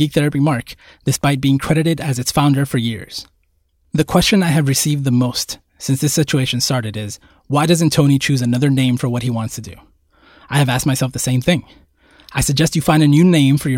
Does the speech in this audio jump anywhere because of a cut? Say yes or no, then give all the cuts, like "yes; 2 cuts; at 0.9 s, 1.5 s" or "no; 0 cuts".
no; 0 cuts